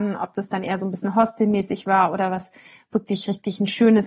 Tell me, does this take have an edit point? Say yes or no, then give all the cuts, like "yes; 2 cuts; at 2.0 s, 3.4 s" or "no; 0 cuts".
no; 0 cuts